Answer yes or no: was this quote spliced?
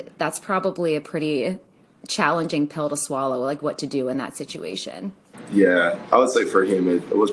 no